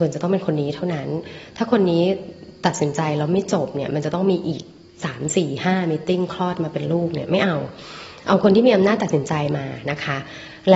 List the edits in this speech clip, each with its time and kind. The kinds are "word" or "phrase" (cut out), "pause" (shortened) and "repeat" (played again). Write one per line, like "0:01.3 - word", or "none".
none

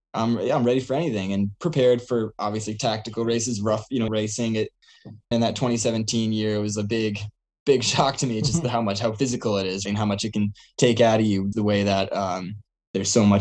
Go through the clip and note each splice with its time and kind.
0:04.1 - word
0:05.3 - word
0:09.9 - word
0:11.5 - word

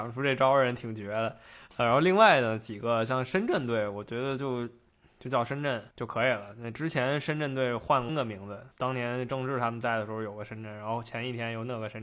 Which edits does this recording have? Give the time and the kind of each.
0:05.9 - pause
0:08.1 - word
0:08.7 - pause

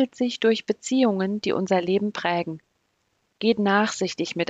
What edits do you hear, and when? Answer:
none

